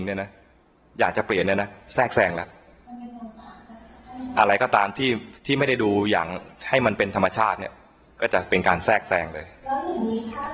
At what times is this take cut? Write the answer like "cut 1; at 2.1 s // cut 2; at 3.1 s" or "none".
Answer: cut 1; at 5.4 s